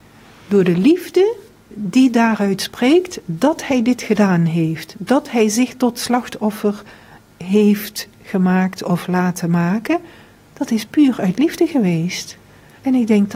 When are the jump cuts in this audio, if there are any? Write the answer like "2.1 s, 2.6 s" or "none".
none